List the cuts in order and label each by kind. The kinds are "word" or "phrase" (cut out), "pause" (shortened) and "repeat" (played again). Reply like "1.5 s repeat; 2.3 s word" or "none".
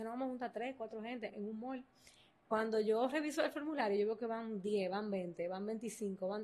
1.3 s word